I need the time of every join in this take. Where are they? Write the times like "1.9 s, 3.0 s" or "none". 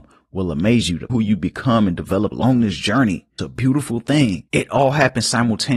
1.1 s, 2.3 s, 3.4 s, 4.5 s

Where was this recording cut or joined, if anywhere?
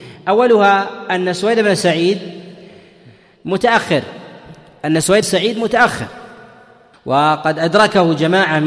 5.2 s

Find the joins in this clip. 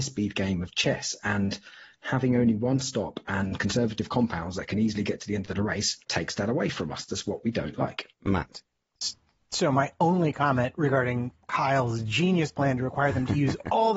6.0 s, 8.1 s

